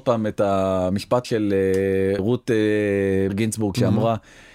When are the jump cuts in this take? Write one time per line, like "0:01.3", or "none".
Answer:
0:01.2
0:02.2
0:03.3